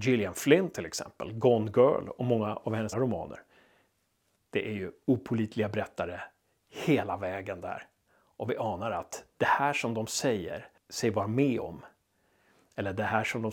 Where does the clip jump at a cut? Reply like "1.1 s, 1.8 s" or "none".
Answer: 2.9 s

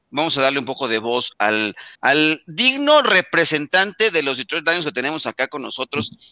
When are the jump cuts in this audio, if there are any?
1.9 s

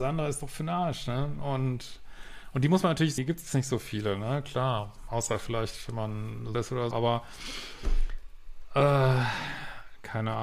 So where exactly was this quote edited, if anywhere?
3.2 s, 6.5 s, 6.9 s

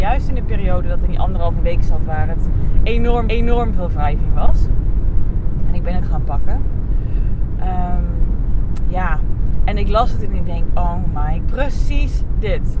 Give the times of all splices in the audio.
1.1 s, 3.3 s, 6.0 s, 11.4 s

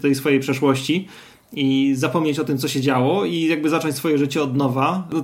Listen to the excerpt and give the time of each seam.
none

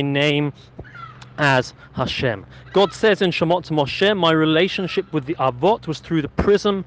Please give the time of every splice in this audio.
none

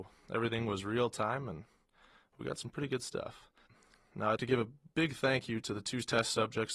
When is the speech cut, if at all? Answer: 3.7 s, 4.4 s

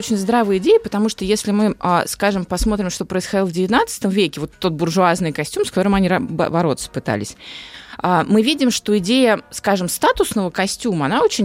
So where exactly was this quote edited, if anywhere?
none

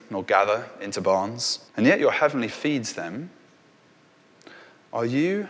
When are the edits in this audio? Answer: 1.7 s, 2.5 s

